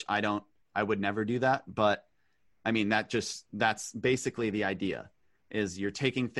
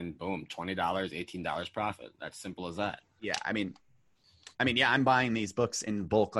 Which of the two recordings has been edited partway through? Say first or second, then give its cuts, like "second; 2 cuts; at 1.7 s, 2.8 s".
second; 1 cut; at 4.5 s